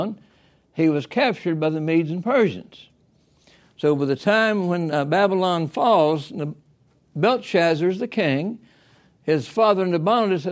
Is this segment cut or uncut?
uncut